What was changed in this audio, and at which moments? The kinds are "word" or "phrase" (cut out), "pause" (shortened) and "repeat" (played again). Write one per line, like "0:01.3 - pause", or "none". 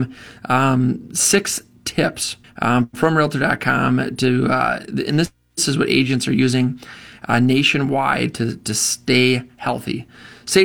0:02.4 - pause